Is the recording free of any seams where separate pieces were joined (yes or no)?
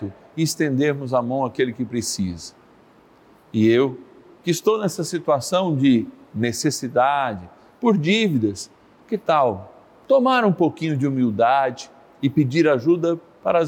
yes